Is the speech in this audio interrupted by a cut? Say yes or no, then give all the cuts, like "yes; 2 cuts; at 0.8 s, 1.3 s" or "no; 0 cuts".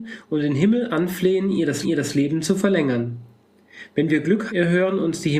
yes; 2 cuts; at 1.8 s, 4.5 s